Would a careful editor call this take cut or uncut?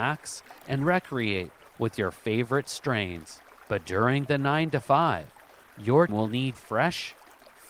cut